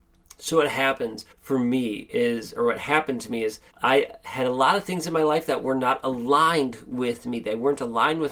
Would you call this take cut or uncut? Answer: cut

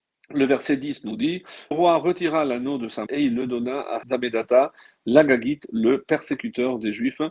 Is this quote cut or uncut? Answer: cut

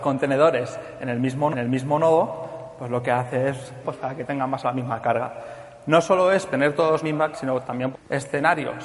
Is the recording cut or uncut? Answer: cut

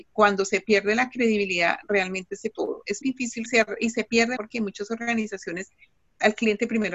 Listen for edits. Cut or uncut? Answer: cut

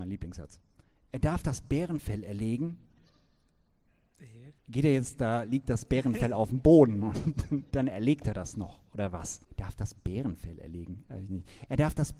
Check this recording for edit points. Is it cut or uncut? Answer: cut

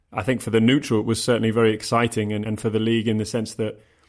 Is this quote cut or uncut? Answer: cut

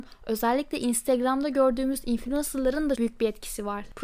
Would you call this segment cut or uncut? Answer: cut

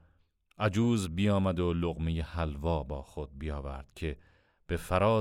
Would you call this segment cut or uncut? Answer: uncut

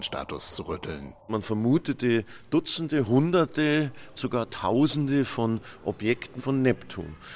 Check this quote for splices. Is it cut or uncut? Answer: cut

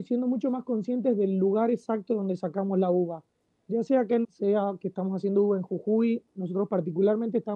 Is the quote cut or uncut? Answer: cut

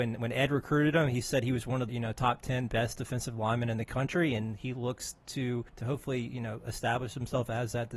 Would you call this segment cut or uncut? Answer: cut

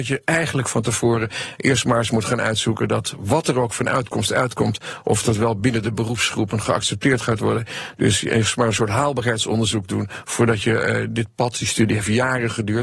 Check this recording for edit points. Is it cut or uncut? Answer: uncut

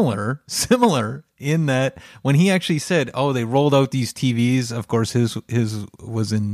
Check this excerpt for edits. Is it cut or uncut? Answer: uncut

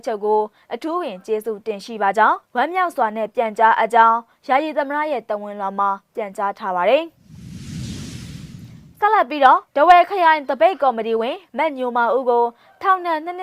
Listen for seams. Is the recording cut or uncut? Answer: cut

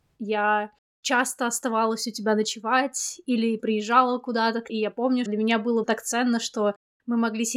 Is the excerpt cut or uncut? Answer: cut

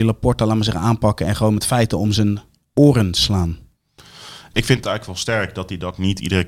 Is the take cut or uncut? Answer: uncut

